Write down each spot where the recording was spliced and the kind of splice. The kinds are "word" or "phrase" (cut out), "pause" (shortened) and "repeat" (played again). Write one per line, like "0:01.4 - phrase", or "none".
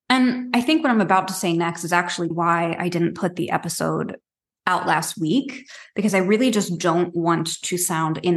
0:02.3 - word

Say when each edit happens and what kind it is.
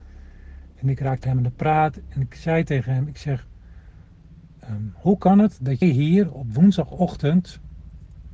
0:01.2 - word
0:05.8 - word

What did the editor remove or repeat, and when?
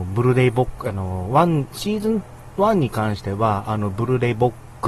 none

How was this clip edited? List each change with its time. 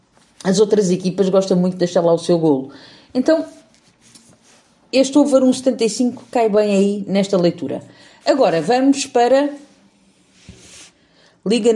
none

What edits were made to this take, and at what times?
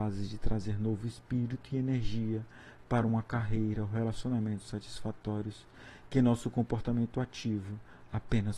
none

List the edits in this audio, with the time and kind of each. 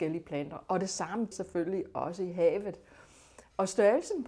0:01.3 - word

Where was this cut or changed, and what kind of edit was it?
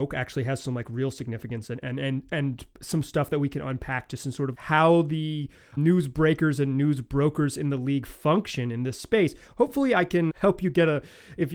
0:04.5 - word
0:05.8 - word
0:10.3 - word

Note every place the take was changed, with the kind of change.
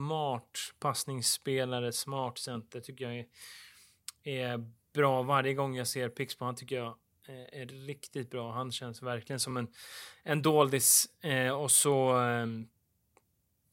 none

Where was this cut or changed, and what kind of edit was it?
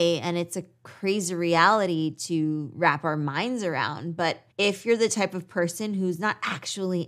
0:04.5 - pause

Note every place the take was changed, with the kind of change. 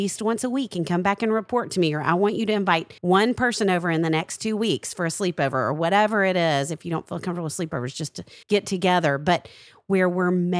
0:03.0 - pause
0:08.4 - pause

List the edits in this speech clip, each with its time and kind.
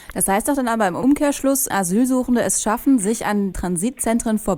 0:01.7 - word
0:03.5 - word

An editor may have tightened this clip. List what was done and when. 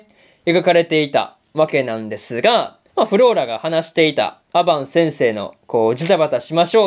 0:02.9 - pause

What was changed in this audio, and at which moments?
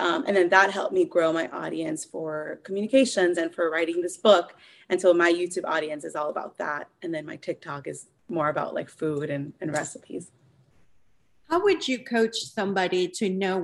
none

